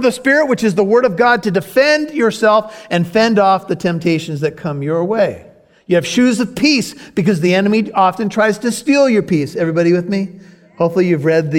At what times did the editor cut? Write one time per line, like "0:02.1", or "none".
none